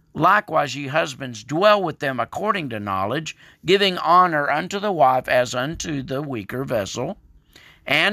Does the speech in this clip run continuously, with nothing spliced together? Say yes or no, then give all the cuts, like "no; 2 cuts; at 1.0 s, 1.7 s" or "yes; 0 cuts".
yes; 0 cuts